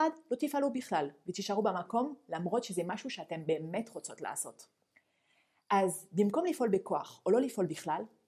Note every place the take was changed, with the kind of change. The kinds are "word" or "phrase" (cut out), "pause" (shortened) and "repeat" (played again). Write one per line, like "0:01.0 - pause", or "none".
none